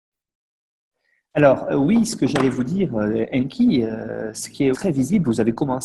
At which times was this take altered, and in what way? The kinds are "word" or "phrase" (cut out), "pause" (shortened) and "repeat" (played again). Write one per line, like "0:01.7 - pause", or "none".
0:04.7 - word